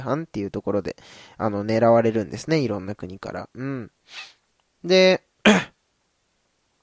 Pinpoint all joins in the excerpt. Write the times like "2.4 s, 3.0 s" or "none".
none

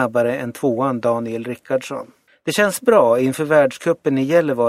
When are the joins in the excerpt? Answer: 2.3 s

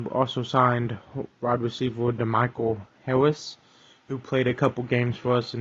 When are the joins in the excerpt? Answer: none

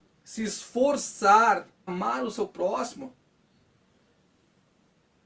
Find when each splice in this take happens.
1.9 s

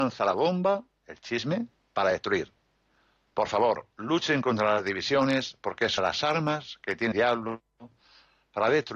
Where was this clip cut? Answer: 6.0 s, 7.1 s

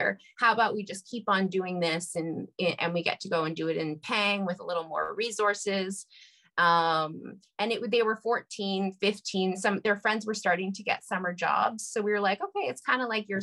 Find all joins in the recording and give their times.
none

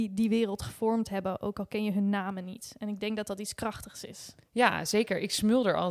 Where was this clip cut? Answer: none

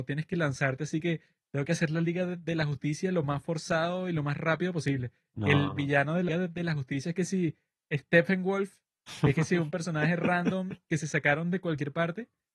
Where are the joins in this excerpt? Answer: 6.3 s

